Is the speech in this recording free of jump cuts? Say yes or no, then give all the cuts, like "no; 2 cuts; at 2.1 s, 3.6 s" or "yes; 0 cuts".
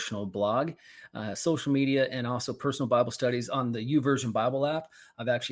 yes; 0 cuts